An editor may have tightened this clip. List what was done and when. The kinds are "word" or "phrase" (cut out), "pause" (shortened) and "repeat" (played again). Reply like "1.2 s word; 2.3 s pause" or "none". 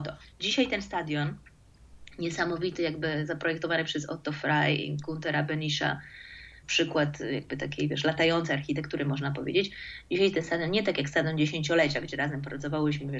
none